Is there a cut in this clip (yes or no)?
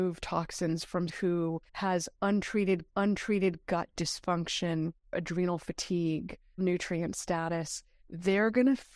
yes